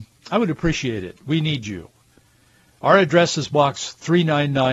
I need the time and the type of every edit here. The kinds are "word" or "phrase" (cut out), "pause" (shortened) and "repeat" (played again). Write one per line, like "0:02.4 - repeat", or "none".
none